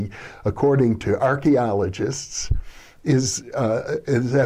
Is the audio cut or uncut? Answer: uncut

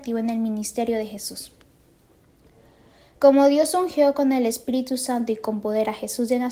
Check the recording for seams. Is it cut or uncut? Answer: uncut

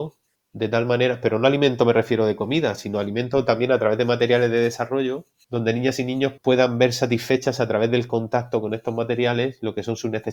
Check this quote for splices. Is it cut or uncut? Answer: cut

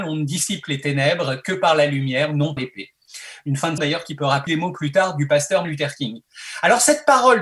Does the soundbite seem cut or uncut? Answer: cut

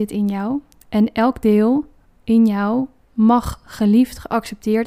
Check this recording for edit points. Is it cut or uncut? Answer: uncut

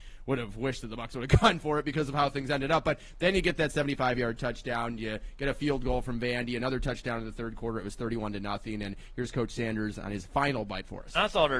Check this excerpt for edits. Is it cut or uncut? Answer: uncut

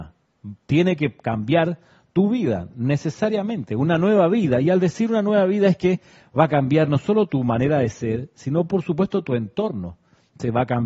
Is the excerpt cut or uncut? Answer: uncut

